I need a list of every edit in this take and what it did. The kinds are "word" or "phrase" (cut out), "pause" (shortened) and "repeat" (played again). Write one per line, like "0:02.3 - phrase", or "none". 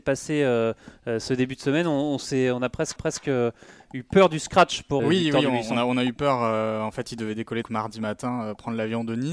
0:03.0 - repeat
0:05.0 - word
0:07.6 - word